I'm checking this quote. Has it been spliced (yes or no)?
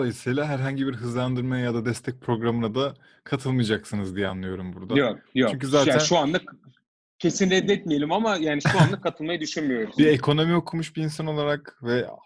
no